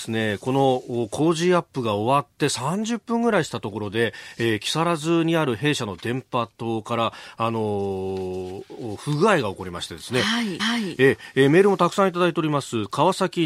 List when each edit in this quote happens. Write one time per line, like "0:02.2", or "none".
0:10.6